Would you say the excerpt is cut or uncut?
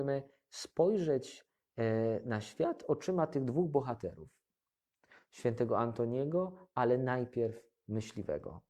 uncut